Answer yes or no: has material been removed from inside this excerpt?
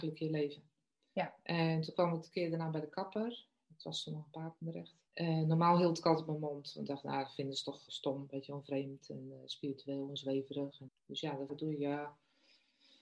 yes